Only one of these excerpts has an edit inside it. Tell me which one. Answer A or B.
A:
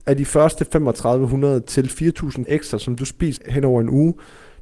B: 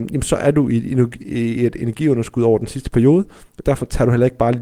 A